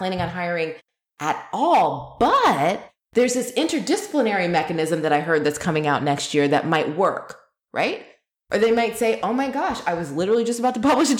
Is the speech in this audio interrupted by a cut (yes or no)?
no